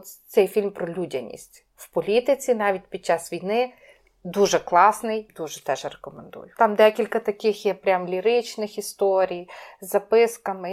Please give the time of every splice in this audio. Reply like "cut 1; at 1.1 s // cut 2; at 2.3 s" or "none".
cut 1; at 5.3 s